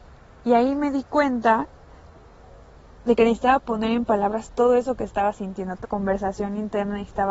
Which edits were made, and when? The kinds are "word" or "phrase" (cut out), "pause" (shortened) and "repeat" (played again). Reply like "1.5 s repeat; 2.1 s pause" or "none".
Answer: 5.8 s word